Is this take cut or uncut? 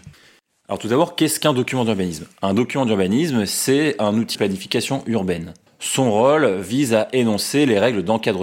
cut